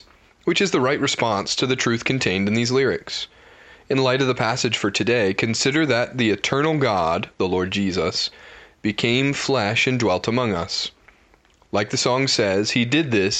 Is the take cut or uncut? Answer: uncut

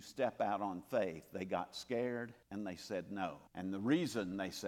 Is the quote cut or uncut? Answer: cut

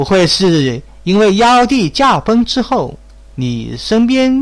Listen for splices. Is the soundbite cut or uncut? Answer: uncut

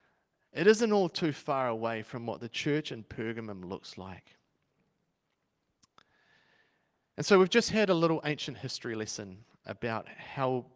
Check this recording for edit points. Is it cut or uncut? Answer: uncut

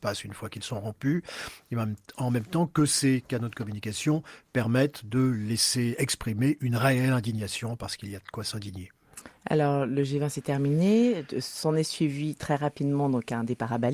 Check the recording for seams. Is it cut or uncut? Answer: uncut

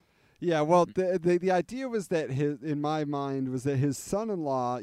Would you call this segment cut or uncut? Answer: uncut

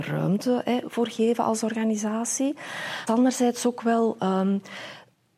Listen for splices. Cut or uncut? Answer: cut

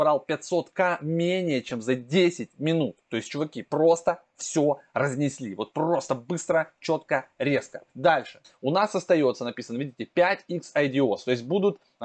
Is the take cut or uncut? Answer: cut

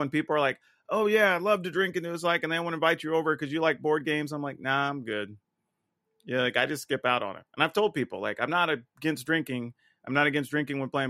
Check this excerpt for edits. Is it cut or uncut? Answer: uncut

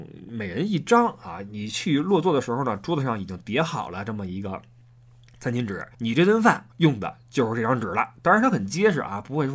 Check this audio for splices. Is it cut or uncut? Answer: cut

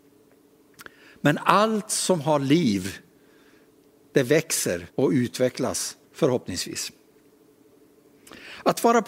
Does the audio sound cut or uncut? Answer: cut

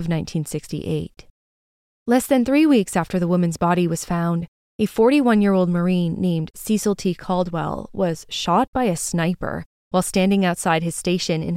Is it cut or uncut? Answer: uncut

